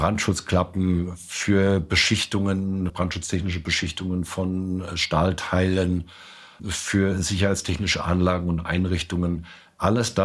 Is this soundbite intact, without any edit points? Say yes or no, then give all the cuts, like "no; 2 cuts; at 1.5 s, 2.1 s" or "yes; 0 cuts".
no; 2 cuts; at 2.9 s, 6.6 s